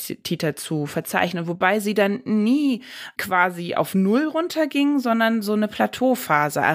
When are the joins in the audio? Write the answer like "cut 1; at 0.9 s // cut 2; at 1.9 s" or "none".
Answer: none